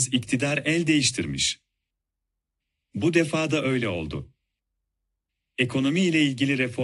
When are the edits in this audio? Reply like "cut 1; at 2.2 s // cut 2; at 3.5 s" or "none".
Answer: none